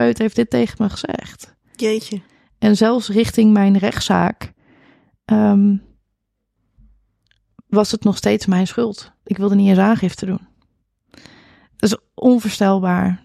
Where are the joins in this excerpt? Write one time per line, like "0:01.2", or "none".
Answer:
none